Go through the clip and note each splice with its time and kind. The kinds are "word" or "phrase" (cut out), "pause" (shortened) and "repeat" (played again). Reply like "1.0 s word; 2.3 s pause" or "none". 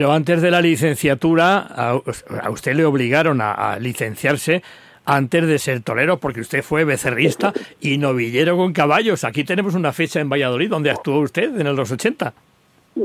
none